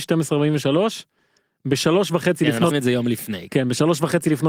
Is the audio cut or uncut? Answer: cut